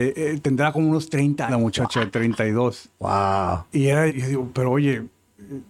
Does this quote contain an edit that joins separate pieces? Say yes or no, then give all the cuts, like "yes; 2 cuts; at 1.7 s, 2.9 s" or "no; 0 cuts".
yes; 2 cuts; at 1.5 s, 4.1 s